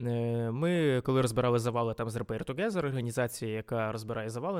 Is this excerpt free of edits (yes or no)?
yes